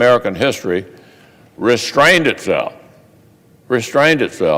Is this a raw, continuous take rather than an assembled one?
yes; 0 cuts

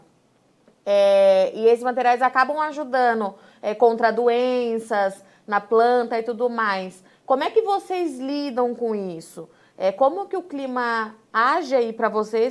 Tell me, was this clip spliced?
no; 0 cuts

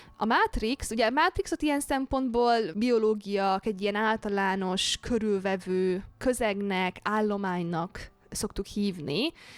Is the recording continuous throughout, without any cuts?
no; 2 cuts; at 2.7 s, 3.6 s

